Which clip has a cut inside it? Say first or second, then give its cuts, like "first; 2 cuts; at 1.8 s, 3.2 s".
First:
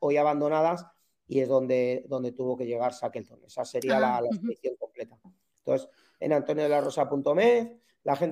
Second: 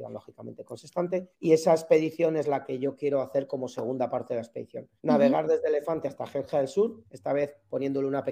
second; 3 cuts; at 1.3 s, 5.0 s, 7.0 s